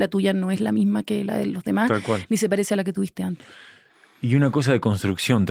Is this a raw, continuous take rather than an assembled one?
yes; 0 cuts

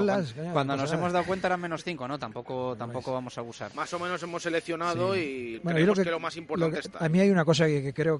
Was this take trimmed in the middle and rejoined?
yes; 1 cut; at 5.6 s

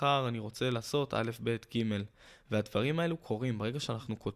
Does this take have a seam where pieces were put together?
no; 0 cuts

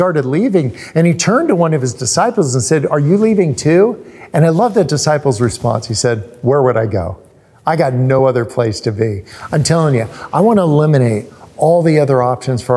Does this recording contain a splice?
no; 0 cuts

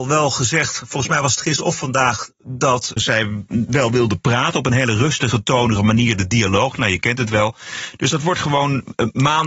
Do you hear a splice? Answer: yes; 2 cuts; at 3.0 s, 5.8 s

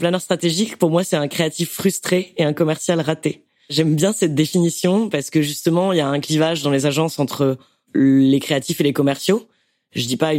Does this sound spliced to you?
no; 0 cuts

